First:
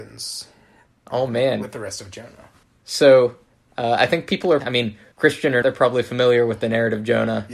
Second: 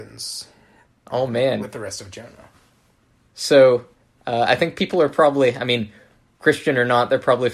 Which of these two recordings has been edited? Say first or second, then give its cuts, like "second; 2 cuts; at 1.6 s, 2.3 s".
first; 4 cuts; at 2.6 s, 4.6 s, 5.1 s, 5.6 s